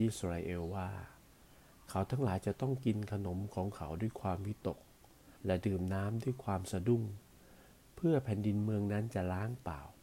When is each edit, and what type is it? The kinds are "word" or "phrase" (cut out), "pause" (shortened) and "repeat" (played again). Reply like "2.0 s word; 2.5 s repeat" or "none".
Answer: 5.4 s pause